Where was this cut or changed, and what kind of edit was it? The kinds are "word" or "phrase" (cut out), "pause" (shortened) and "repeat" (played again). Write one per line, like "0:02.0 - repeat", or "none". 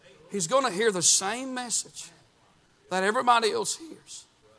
none